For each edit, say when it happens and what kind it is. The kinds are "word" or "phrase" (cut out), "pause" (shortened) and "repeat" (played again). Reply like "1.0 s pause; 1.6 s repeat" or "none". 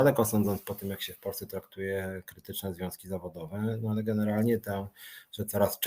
none